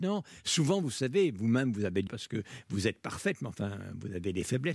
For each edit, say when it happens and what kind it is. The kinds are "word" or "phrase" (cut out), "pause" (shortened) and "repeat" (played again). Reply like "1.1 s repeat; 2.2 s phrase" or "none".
2.1 s phrase